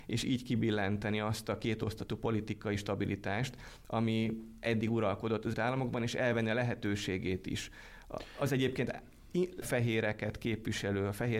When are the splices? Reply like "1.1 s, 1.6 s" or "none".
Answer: 5.5 s, 9.6 s